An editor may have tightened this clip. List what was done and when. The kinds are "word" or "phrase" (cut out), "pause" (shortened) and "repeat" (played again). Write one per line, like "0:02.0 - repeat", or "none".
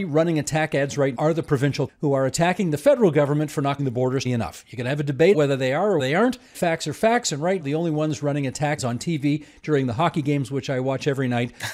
0:01.1 - word
0:01.9 - word
0:03.8 - word
0:04.3 - word
0:05.3 - word
0:06.0 - word
0:06.5 - word
0:07.6 - word
0:08.8 - word

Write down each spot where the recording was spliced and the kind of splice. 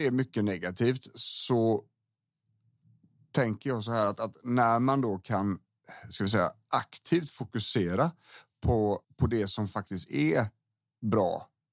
0:09.0 - pause

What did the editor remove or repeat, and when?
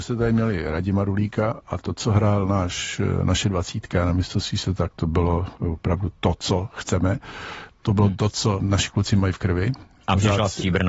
0:08.6 - word

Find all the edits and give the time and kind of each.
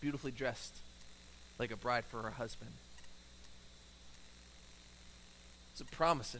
0:01.5 - pause

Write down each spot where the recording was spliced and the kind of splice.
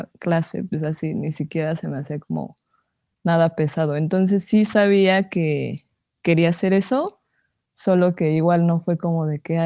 none

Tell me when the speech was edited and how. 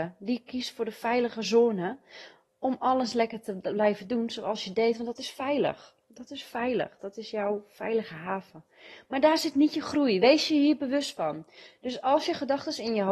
none

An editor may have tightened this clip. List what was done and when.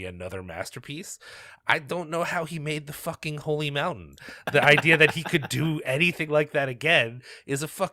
none

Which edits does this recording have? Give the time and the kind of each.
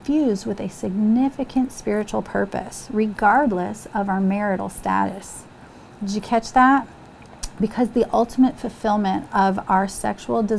none

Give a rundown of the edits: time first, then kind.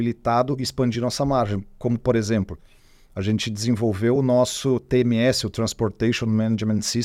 none

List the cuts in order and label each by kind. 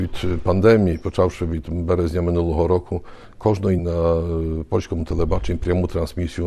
0:03.8 - word

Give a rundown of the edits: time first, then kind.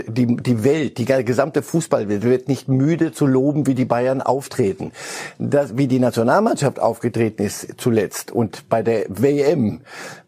none

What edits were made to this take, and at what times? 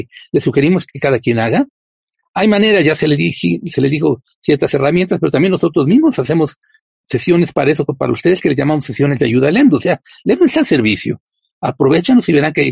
none

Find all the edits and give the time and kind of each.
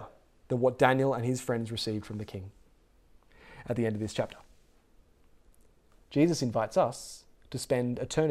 none

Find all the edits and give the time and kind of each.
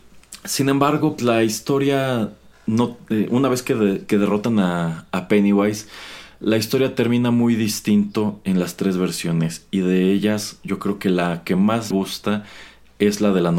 0:01.2 - word
0:03.3 - word
0:11.9 - word

